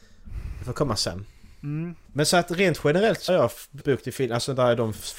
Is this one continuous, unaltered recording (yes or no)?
no